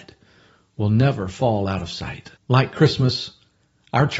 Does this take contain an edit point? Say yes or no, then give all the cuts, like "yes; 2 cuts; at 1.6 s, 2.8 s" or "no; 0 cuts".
yes; 1 cut; at 2.4 s